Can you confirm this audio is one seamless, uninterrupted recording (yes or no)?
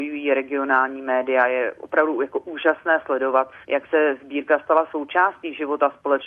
no